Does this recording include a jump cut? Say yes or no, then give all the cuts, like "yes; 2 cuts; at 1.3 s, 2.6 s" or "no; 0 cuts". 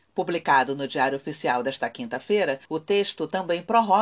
yes; 1 cut; at 2.6 s